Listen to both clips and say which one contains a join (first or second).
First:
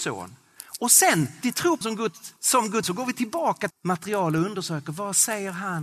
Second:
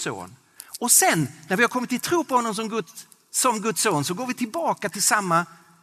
first